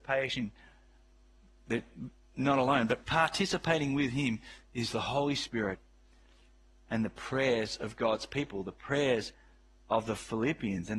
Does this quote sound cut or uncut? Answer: uncut